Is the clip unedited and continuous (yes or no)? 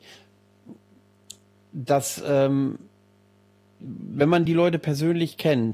yes